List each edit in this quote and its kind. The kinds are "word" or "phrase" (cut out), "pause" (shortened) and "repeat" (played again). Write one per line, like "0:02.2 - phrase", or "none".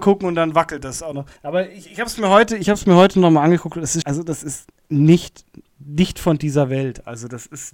0:01.4 - pause
0:04.0 - word